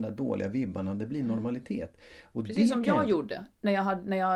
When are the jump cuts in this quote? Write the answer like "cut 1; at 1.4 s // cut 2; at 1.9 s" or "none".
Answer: none